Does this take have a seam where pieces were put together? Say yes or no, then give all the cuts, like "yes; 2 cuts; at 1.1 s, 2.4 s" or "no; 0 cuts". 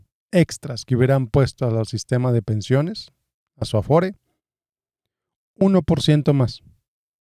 no; 0 cuts